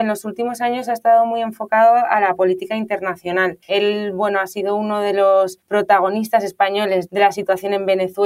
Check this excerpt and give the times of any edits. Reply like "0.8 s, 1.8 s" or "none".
3.6 s, 5.6 s